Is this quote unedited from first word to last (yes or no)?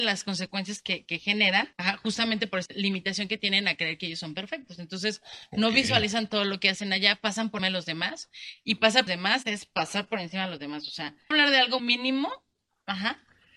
no